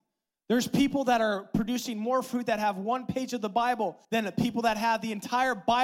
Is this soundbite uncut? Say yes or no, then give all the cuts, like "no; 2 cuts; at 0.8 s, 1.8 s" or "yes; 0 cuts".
no; 1 cut; at 4.0 s